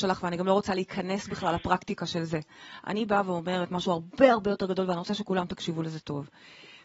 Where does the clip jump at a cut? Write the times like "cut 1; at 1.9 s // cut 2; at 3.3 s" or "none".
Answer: none